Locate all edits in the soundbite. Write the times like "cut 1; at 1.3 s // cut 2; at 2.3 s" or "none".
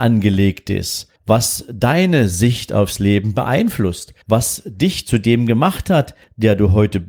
cut 1; at 1.2 s // cut 2; at 4.2 s

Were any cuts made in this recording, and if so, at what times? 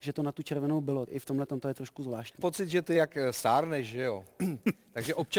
cut 1; at 1.1 s // cut 2; at 2.4 s // cut 3; at 2.9 s

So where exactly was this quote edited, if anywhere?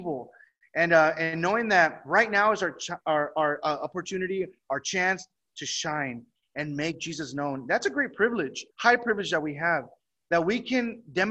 cut 1; at 8.7 s

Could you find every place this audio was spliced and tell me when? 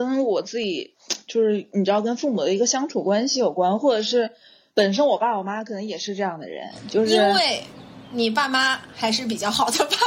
none

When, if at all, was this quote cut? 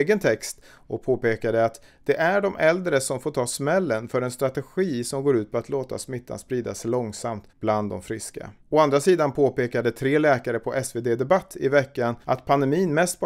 cut 1; at 7.5 s // cut 2; at 8.6 s // cut 3; at 12.2 s

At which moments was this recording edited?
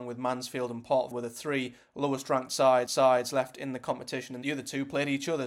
cut 1; at 1.1 s // cut 2; at 2.9 s // cut 3; at 4.4 s

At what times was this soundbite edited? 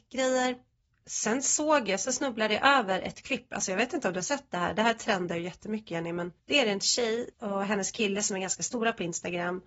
cut 1; at 6.4 s // cut 2; at 7.3 s

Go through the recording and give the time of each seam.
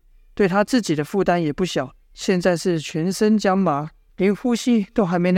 cut 1; at 2.0 s // cut 2; at 4.1 s

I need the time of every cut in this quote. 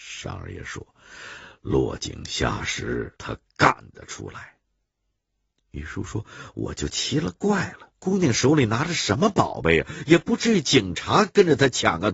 cut 1; at 3.2 s // cut 2; at 4.6 s // cut 3; at 7.9 s

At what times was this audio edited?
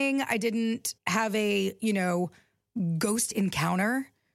cut 1; at 1.0 s

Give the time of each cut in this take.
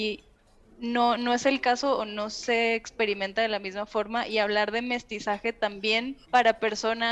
cut 1; at 6.2 s

